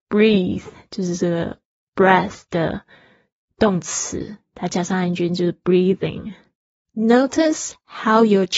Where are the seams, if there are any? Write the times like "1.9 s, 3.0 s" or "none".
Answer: none